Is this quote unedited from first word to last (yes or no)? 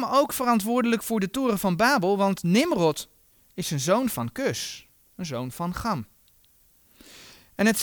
yes